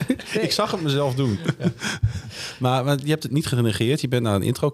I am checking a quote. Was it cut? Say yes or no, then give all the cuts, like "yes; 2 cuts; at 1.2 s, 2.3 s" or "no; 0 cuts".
no; 0 cuts